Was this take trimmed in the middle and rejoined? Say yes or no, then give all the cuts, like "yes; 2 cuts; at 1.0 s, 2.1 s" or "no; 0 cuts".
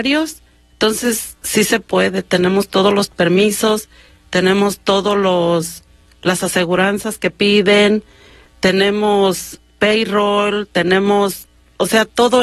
no; 0 cuts